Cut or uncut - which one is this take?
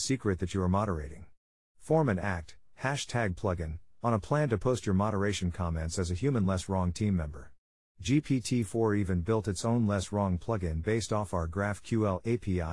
uncut